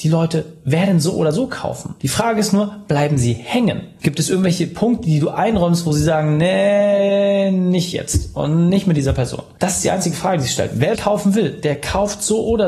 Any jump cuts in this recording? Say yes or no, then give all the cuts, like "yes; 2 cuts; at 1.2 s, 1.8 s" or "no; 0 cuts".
yes; 1 cut; at 11.0 s